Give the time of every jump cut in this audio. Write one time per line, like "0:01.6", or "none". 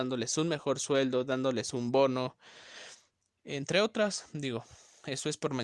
none